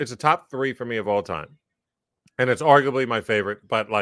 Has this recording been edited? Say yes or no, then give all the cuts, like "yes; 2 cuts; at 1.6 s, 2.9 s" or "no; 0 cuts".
no; 0 cuts